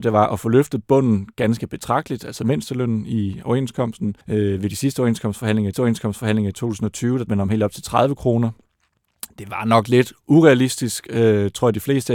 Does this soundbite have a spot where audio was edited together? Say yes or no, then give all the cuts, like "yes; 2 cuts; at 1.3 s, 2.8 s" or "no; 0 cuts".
yes; 3 cuts; at 4.2 s, 5.7 s, 7.3 s